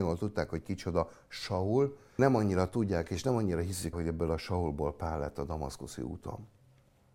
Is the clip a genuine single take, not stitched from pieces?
no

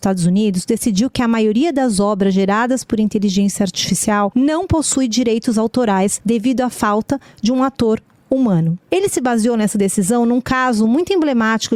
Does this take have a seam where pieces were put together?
no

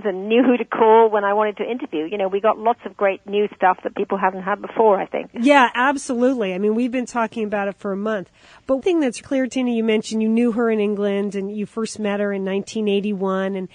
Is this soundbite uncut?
no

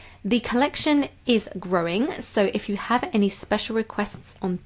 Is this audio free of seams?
yes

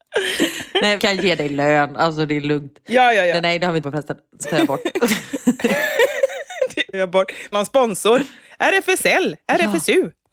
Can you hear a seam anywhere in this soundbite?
yes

